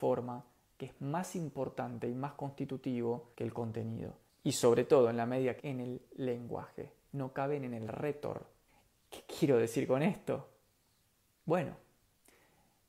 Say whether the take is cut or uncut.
cut